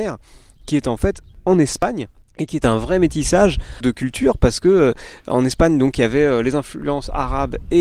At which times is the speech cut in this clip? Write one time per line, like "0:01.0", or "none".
none